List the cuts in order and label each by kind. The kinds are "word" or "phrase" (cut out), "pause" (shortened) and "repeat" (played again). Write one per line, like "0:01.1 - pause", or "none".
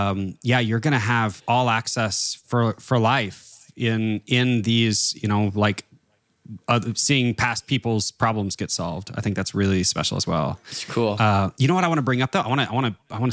none